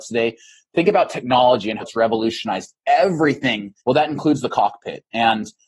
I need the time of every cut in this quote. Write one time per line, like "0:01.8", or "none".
0:01.8
0:03.8